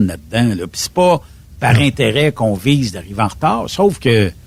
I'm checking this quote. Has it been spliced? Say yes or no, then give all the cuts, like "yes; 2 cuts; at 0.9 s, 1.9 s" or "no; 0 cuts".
no; 0 cuts